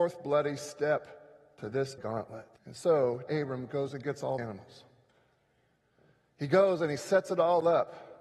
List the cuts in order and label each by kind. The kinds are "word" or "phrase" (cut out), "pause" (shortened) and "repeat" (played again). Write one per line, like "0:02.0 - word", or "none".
0:02.0 - word
0:02.6 - pause
0:03.3 - word
0:04.4 - word